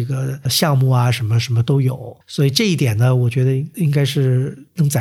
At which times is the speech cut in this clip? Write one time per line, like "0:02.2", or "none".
0:02.2